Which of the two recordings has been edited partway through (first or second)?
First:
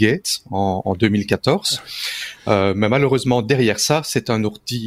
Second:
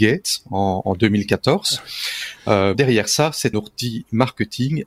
second